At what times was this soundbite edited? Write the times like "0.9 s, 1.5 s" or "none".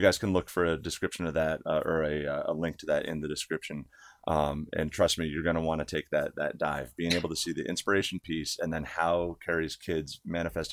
none